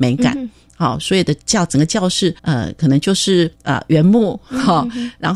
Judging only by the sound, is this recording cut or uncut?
cut